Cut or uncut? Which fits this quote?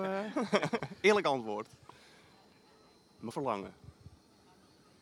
cut